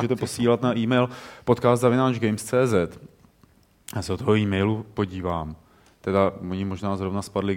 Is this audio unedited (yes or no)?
yes